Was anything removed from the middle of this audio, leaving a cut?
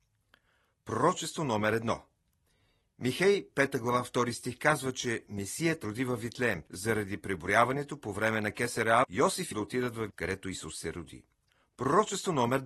yes; 5 cuts; at 5.8 s, 6.7 s, 9.0 s, 9.5 s, 10.1 s

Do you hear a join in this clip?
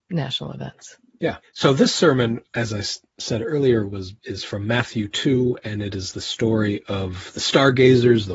no; 0 cuts

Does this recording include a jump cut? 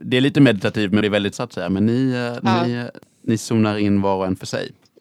yes; 2 cuts; at 1.0 s, 1.3 s

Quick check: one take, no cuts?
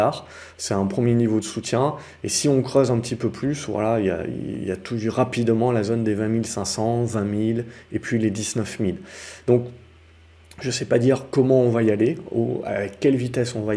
yes; 0 cuts

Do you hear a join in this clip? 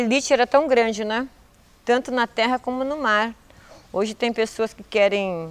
no; 0 cuts

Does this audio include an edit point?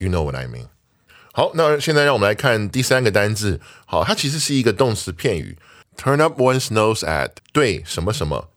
no; 0 cuts

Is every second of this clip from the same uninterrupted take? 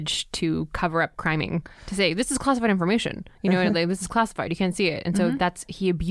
no; 2 cuts; at 1.7 s, 3.3 s

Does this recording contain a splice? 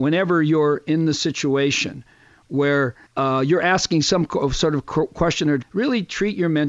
yes; 2 cuts; at 3.1 s, 5.6 s

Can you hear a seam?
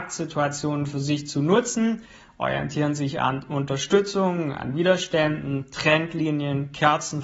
no; 0 cuts

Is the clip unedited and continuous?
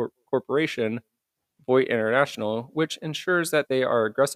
yes; 0 cuts

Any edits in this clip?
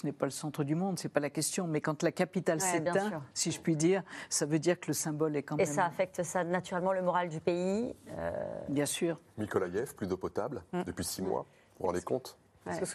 no; 0 cuts

